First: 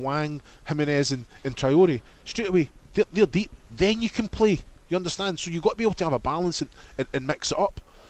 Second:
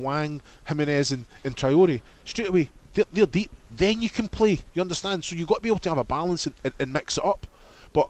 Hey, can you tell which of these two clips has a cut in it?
second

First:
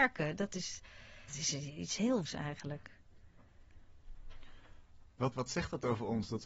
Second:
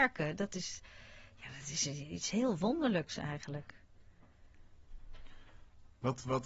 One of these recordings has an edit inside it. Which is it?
first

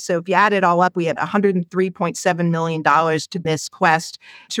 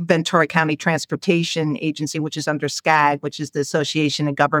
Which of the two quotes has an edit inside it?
first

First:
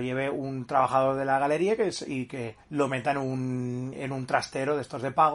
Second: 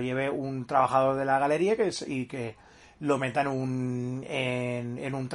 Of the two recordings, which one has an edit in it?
first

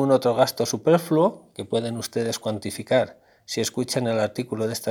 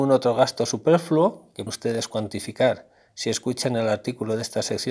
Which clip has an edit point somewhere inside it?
second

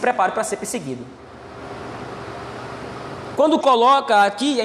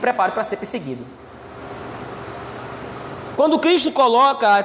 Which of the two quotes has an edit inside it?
first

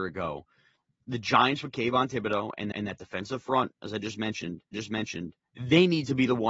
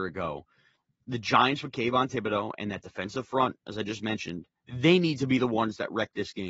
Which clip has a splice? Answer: first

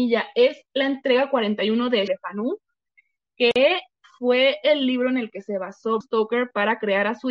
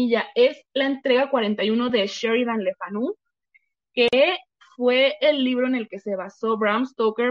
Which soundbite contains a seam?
first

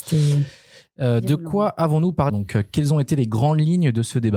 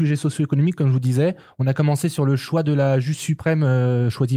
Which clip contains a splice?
first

